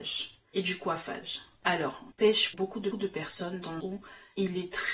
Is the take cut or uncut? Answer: cut